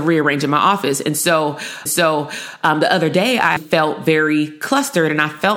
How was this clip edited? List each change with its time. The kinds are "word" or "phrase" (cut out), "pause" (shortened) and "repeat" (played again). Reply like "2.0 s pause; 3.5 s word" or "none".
1.9 s repeat; 3.6 s word